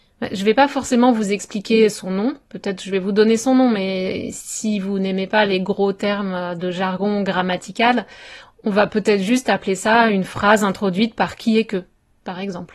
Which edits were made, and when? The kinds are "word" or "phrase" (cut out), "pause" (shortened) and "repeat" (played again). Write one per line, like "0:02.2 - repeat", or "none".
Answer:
none